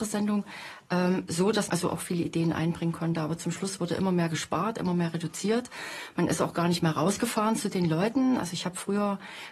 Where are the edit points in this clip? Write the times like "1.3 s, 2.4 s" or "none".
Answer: 1.7 s